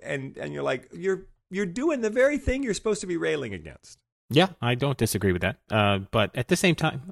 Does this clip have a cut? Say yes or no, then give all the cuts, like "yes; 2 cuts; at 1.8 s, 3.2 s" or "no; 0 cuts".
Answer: no; 0 cuts